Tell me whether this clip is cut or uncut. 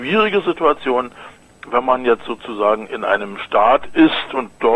uncut